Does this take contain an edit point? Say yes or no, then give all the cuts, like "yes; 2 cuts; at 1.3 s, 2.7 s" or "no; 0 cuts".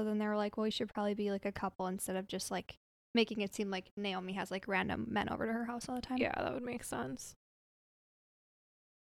no; 0 cuts